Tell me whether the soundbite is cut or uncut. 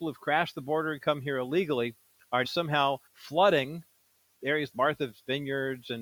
cut